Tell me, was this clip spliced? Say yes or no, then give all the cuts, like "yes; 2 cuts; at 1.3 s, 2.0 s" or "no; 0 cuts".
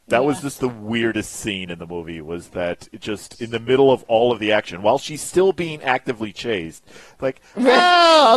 no; 0 cuts